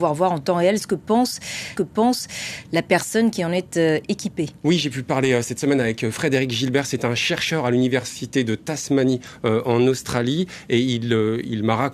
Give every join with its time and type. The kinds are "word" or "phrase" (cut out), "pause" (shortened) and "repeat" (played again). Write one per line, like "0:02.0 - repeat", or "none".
0:01.8 - repeat

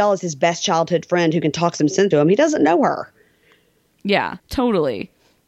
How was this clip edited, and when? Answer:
0:02.1 - word
0:04.4 - pause

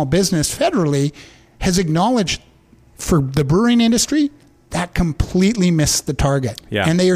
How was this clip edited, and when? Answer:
none

